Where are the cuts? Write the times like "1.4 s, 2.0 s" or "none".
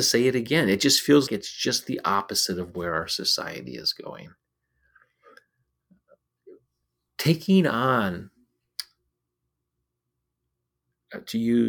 1.3 s